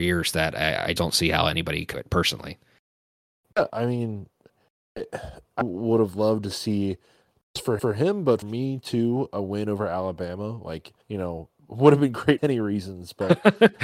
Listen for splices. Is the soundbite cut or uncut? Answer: cut